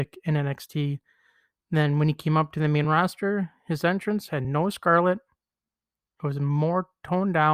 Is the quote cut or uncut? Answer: uncut